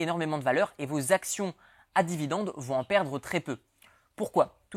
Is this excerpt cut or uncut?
uncut